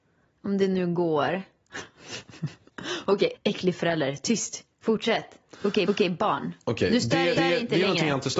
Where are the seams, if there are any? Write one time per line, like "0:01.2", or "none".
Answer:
0:03.3
0:04.7
0:05.9
0:07.4